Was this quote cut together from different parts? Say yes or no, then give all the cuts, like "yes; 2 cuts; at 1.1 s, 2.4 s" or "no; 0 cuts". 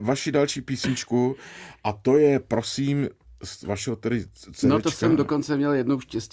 no; 0 cuts